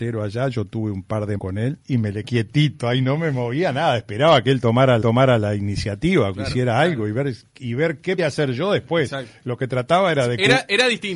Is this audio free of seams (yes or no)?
no